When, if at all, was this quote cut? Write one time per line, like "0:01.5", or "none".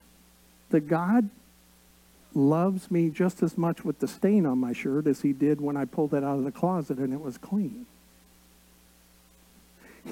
none